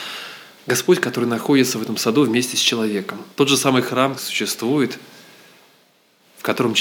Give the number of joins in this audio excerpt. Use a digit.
2